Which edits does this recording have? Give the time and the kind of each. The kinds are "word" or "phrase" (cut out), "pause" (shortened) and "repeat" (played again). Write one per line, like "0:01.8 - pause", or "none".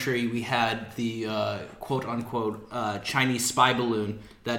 none